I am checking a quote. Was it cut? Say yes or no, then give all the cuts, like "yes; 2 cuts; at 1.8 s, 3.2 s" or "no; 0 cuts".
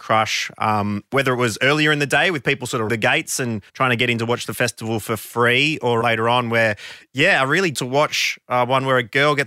yes; 4 cuts; at 2.9 s, 3.7 s, 6.0 s, 7.7 s